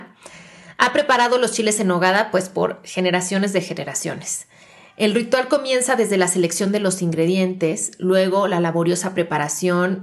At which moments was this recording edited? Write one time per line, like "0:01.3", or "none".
none